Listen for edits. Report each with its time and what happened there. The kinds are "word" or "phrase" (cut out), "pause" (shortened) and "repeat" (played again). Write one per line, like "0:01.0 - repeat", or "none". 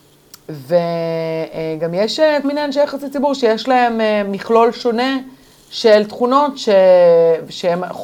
0:02.4 - word